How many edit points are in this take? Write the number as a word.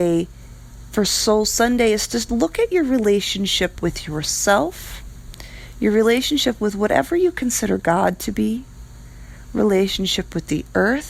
zero